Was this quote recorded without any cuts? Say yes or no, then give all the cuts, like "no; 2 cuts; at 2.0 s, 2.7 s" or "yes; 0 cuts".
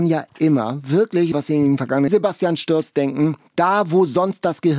no; 2 cuts; at 1.3 s, 2.1 s